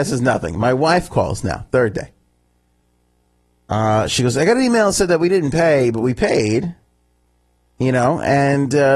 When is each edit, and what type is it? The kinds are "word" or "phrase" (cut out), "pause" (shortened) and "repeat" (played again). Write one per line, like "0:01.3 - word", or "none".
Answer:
none